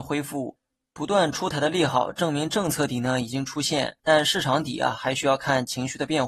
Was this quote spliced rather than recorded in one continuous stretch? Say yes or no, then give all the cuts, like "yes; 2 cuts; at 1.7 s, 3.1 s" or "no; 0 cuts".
yes; 1 cut; at 4.0 s